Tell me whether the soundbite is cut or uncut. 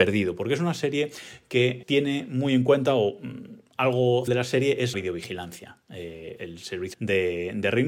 cut